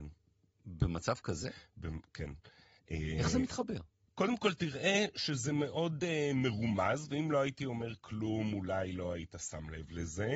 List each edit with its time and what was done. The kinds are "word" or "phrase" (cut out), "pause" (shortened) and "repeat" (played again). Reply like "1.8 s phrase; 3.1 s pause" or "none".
none